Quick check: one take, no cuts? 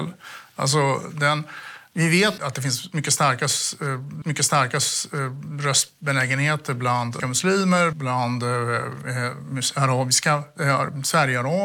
no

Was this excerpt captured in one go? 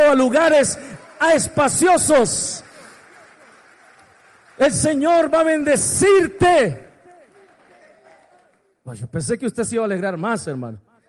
yes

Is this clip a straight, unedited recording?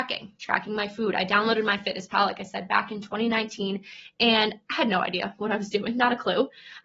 yes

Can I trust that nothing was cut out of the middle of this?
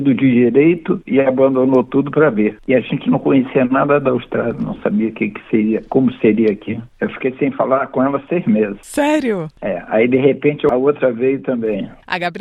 yes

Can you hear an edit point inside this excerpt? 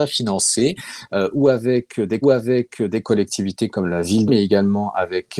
yes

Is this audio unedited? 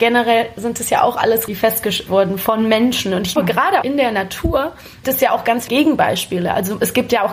no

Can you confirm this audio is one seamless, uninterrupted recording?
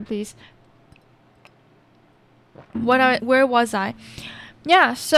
no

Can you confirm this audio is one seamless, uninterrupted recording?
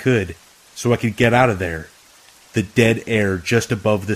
yes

